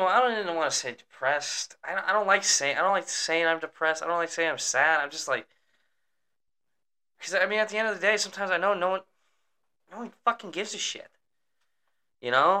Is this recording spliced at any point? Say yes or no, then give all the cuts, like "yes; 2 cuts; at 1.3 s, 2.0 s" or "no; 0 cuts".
no; 0 cuts